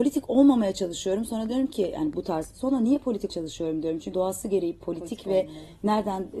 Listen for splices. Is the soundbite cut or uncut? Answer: cut